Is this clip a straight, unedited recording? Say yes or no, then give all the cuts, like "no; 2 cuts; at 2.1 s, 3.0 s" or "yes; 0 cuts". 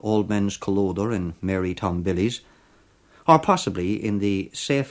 yes; 0 cuts